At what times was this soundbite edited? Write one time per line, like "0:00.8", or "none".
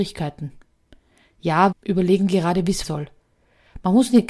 0:01.7
0:02.8

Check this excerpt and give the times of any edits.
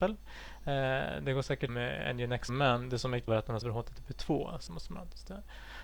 0:01.7
0:02.5
0:03.3
0:03.6
0:04.7

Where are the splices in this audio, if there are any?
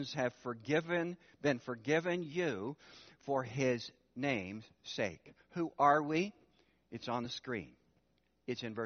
none

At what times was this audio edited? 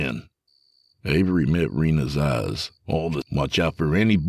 0:02.8
0:03.2

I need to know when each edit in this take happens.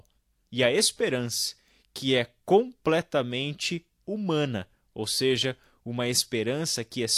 none

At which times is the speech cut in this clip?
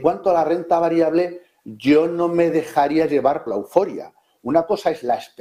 0:03.5

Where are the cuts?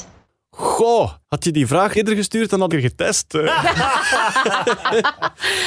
0:01.2
0:02.0
0:02.7

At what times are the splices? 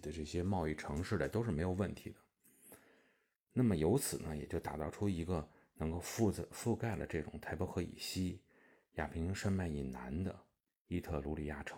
none

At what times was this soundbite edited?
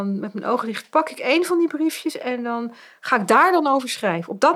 none

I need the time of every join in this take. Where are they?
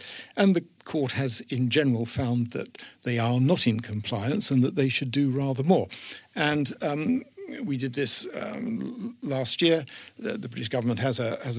none

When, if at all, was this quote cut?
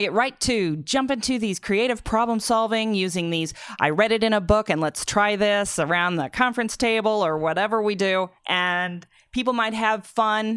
0:08.4

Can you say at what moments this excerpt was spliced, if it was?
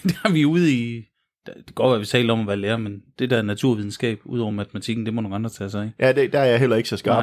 none

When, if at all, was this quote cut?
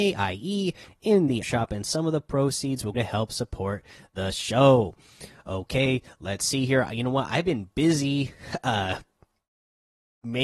0:01.4
0:02.9

